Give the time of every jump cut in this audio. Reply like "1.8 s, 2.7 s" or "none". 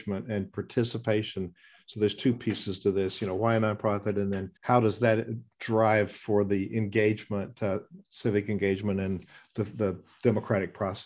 4.6 s